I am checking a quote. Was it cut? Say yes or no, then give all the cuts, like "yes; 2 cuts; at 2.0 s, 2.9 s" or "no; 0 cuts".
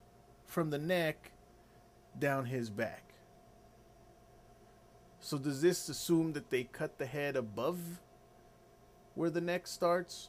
no; 0 cuts